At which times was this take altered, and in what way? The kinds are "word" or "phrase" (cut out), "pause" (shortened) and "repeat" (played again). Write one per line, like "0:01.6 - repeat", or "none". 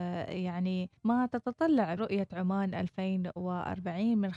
0:01.0 - pause
0:02.0 - word